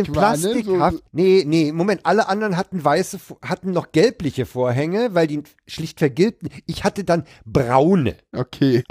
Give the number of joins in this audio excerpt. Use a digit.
1